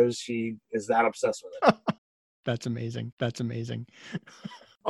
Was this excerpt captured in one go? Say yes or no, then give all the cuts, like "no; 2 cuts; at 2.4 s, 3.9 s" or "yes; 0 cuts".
no; 2 cuts; at 2.0 s, 3.1 s